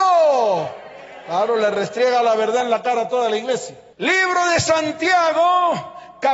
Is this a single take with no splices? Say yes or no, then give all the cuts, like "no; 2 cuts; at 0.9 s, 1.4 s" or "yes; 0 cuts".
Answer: yes; 0 cuts